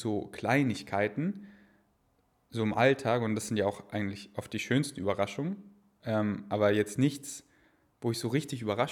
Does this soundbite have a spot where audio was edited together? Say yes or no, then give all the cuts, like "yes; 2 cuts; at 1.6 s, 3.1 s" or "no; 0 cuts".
no; 0 cuts